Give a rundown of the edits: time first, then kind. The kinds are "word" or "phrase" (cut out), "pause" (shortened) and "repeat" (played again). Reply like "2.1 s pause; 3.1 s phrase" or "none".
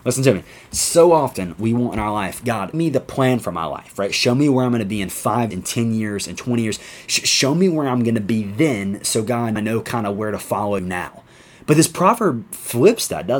2.7 s word; 5.5 s word; 9.6 s word; 10.8 s word

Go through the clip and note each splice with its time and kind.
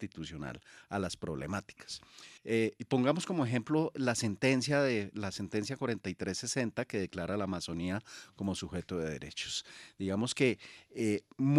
2.4 s pause

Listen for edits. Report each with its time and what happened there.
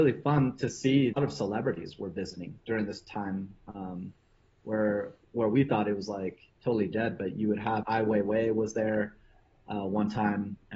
1.1 s phrase; 6.6 s pause; 7.8 s word

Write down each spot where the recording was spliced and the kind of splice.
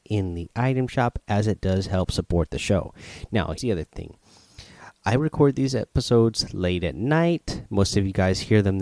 3.6 s word

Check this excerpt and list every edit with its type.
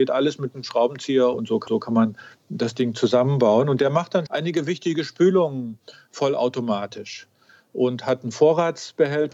1.3 s phrase; 1.7 s repeat; 4.3 s word

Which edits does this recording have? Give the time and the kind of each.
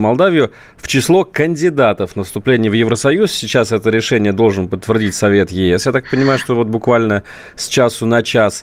none

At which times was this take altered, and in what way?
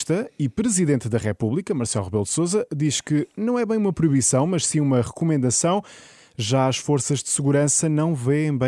none

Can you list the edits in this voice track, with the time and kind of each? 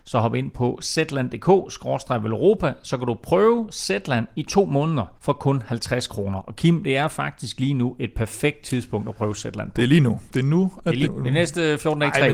5.2 s pause; 10.3 s pause; 11.0 s word

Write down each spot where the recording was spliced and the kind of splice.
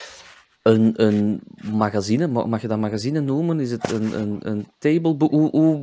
none

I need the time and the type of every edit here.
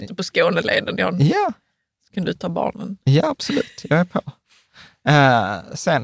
none

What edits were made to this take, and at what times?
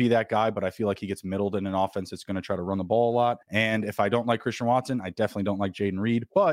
3.4 s pause

